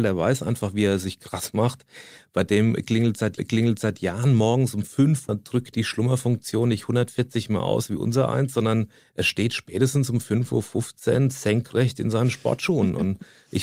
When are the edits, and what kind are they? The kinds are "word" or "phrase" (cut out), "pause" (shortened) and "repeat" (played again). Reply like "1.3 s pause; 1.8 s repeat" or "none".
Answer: 3.4 s repeat; 5.3 s phrase; 5.7 s word; 9.0 s pause